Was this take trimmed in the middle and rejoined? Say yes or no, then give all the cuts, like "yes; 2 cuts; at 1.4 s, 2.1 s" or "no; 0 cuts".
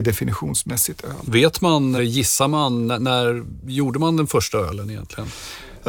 yes; 1 cut; at 2.0 s